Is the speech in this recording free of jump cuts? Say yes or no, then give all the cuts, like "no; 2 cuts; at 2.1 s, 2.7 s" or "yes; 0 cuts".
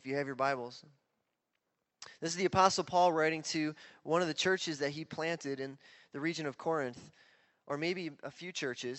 yes; 0 cuts